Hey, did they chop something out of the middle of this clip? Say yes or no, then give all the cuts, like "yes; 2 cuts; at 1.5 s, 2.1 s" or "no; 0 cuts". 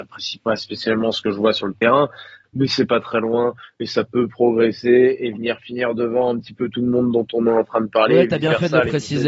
no; 0 cuts